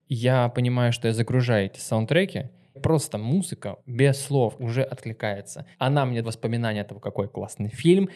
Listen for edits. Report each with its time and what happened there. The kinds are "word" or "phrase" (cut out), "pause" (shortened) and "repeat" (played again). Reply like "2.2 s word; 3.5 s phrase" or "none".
2.7 s phrase; 3.8 s pause; 4.6 s word; 5.7 s pause; 6.2 s word